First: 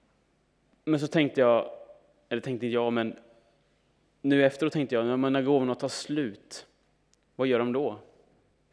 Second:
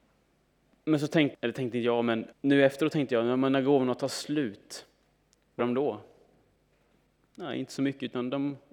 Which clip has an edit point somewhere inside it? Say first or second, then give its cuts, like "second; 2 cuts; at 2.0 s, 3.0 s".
second; 3 cuts; at 1.3 s, 2.3 s, 5.6 s